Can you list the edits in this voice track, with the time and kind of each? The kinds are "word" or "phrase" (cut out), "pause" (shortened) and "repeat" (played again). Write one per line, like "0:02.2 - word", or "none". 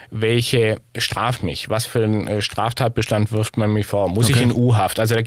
0:01.4 - word